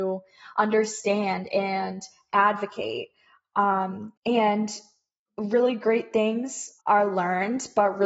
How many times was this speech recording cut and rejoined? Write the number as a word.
two